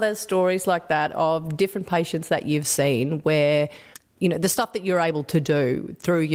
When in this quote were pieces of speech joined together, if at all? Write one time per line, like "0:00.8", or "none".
0:03.9